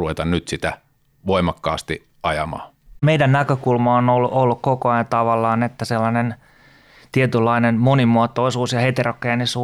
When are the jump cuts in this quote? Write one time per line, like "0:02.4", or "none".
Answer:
none